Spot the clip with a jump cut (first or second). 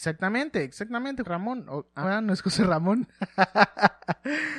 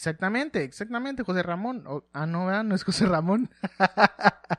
first